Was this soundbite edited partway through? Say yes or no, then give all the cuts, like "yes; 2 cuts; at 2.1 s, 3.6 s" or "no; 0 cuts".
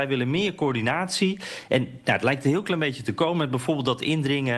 no; 0 cuts